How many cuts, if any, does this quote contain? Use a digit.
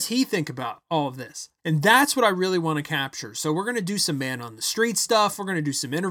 1